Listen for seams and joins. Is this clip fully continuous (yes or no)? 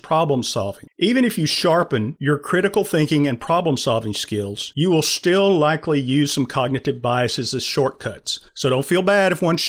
no